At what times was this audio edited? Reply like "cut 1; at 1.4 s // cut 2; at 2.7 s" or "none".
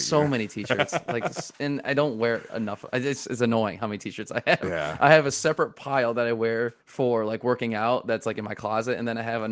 cut 1; at 6.8 s